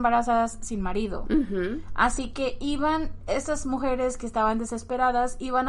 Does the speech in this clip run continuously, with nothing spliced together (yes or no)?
yes